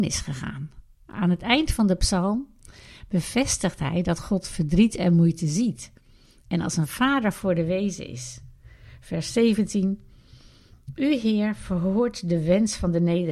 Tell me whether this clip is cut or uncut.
uncut